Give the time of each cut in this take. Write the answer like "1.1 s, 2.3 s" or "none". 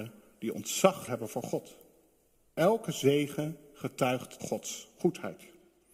1.1 s, 4.4 s

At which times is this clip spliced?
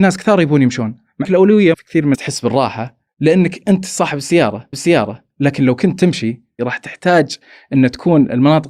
1.2 s, 1.7 s, 2.1 s, 3.1 s, 4.7 s

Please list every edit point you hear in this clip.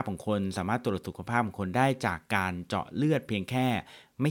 none

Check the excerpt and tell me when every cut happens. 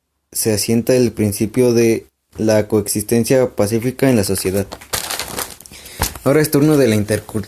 none

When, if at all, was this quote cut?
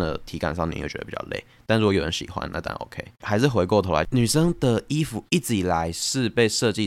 none

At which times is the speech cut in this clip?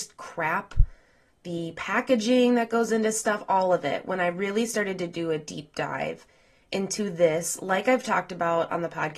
none

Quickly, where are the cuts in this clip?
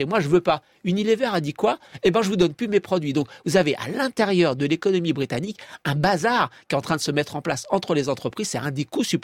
none

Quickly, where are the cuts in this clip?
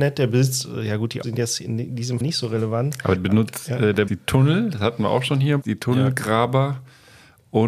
1.2 s, 2.2 s, 3.2 s, 4.1 s, 5.6 s

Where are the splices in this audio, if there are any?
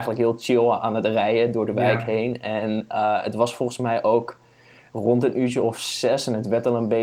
none

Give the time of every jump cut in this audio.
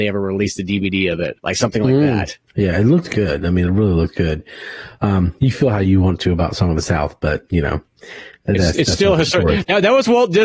1.4 s, 2.5 s

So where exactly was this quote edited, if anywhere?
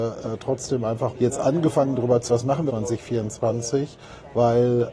1.1 s, 2.3 s, 2.7 s

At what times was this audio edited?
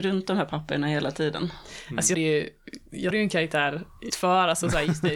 2.1 s, 3.1 s, 4.1 s

